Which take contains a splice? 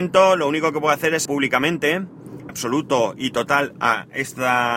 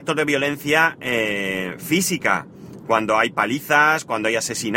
first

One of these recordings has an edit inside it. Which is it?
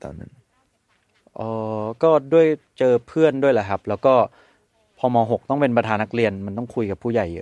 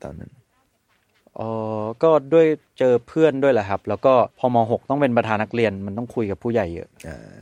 second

